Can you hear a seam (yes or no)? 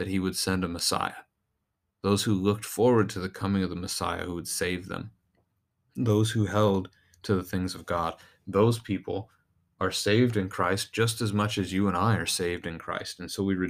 no